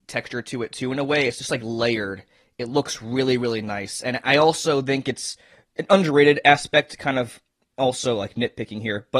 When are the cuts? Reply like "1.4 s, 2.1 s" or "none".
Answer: none